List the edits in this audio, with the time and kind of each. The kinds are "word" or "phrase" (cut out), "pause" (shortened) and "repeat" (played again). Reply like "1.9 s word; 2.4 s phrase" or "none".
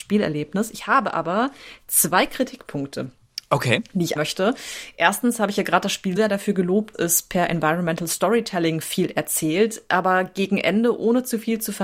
4.2 s word; 6.2 s word; 6.9 s word